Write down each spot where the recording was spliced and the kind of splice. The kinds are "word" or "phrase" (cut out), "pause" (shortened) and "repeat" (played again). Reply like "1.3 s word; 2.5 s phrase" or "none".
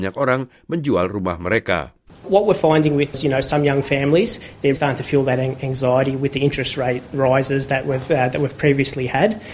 2.1 s pause; 3.1 s word; 4.7 s word

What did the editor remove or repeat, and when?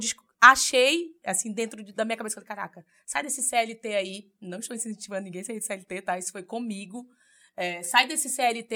none

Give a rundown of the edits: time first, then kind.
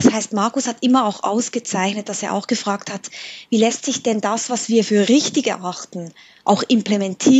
none

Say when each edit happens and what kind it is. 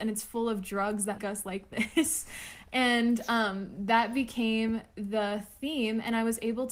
1.2 s word

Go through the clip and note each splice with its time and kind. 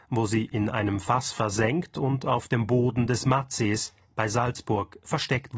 none

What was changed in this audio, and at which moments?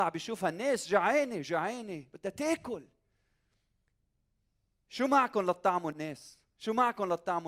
none

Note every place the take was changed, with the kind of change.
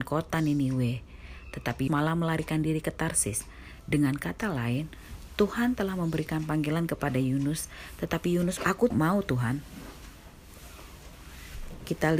1.9 s word; 8.6 s word; 8.9 s word

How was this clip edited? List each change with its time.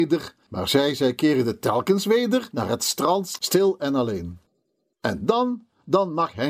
none

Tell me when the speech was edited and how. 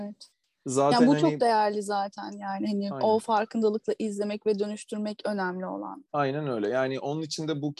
6.1 s pause

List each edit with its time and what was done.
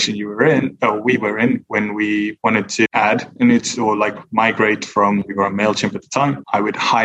none

